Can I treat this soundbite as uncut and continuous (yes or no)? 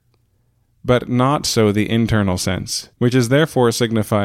no